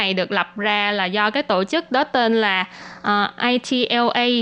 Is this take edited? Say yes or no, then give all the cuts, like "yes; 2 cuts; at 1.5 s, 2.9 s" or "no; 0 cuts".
no; 0 cuts